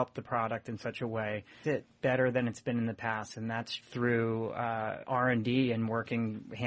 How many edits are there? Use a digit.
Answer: 2